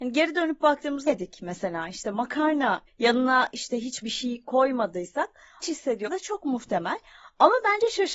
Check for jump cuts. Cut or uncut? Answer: cut